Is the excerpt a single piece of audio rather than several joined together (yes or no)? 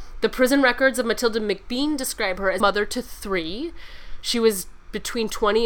no